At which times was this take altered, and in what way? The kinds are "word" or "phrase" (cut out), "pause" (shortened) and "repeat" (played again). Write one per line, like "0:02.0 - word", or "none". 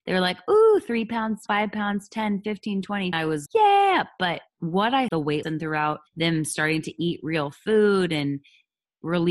0:01.5 - word
0:03.1 - phrase
0:03.5 - word
0:04.5 - pause
0:05.1 - phrase
0:05.4 - word
0:06.1 - pause